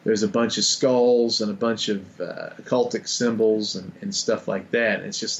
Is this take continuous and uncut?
yes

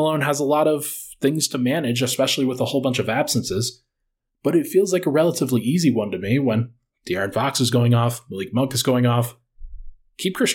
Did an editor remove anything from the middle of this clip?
no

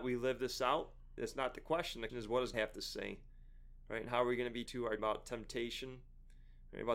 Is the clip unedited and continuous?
no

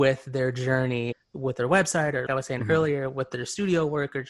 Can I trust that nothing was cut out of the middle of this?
no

